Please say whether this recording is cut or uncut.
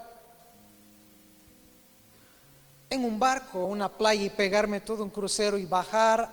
cut